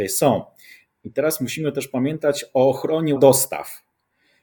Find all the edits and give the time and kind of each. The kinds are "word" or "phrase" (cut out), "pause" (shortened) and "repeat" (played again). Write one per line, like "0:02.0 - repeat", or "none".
0:03.2 - word